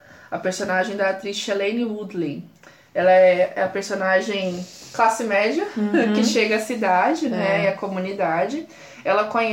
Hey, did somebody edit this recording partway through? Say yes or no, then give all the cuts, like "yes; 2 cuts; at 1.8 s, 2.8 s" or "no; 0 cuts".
no; 0 cuts